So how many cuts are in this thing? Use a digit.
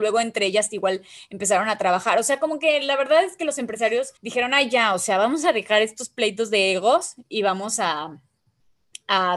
1